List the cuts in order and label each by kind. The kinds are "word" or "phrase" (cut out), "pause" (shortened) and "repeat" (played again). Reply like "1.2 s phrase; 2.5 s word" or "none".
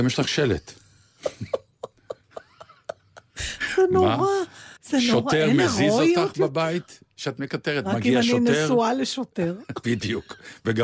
4.8 s pause